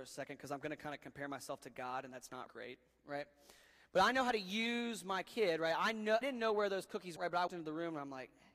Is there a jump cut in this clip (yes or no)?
yes